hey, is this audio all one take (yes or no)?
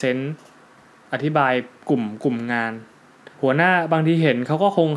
no